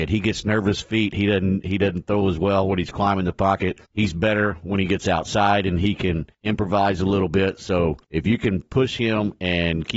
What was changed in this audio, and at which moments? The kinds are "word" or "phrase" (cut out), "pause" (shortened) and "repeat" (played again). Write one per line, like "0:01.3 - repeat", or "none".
0:03.9 - pause
0:06.3 - pause
0:08.0 - pause